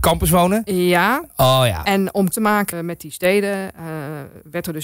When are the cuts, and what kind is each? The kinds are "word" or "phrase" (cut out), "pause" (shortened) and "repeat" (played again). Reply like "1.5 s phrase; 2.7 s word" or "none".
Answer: 2.3 s word; 2.7 s word